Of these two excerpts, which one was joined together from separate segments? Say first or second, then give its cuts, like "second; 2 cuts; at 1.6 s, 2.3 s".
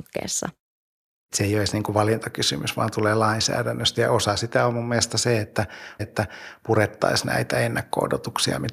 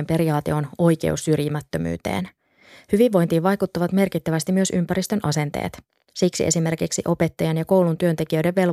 first; 1 cut; at 6.0 s